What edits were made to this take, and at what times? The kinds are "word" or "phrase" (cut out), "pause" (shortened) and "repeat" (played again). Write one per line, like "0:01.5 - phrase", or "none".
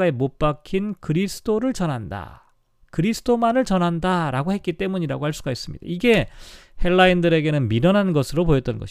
none

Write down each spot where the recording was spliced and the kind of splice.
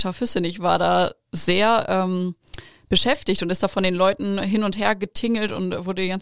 none

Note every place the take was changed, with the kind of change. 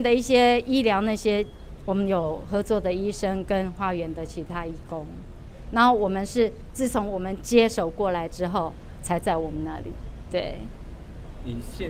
0:10.3 - word

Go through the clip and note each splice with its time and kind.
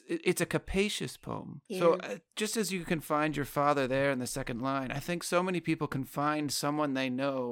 0:01.7 - pause

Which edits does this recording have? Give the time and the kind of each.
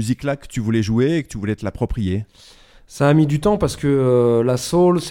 none

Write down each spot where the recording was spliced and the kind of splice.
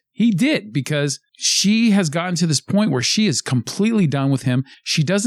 none

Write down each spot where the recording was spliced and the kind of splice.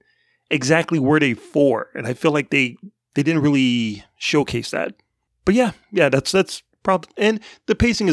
none

